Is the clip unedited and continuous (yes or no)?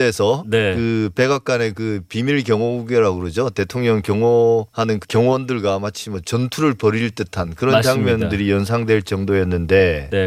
yes